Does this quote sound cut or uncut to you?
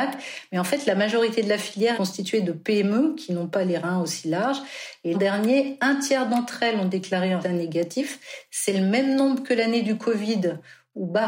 cut